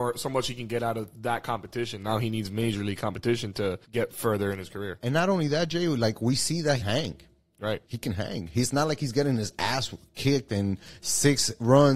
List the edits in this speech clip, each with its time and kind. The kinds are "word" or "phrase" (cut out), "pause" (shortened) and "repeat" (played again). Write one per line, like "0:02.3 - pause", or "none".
0:03.8 - pause
0:06.8 - phrase
0:07.8 - pause